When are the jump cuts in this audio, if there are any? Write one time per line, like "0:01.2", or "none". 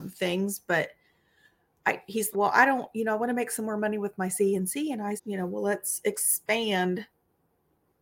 0:02.3
0:05.2